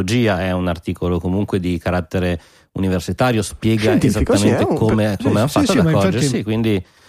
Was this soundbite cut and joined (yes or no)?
no